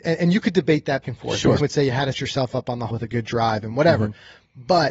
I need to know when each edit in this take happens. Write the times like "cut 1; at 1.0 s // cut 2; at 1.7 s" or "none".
cut 1; at 1.0 s // cut 2; at 1.6 s // cut 3; at 2.1 s // cut 4; at 2.9 s